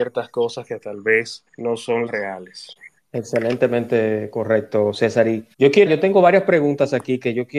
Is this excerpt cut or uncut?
cut